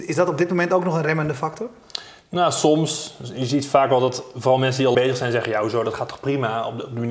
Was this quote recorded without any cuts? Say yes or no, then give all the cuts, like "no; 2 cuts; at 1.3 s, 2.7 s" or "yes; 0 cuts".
no; 1 cut; at 4.9 s